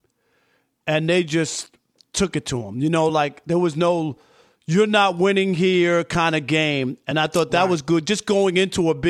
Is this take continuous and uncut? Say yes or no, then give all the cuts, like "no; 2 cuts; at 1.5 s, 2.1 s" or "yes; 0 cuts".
yes; 0 cuts